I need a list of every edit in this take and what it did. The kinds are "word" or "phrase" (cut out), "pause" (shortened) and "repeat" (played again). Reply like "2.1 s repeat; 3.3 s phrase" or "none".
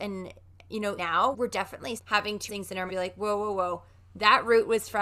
1.0 s word; 1.3 s word; 2.0 s word; 2.5 s word; 2.9 s word